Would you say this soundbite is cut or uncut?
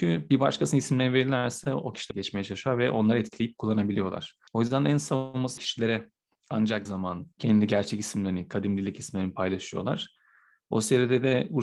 cut